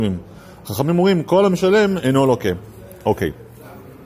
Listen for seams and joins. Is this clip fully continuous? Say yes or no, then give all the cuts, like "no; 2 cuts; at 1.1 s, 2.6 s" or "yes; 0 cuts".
yes; 0 cuts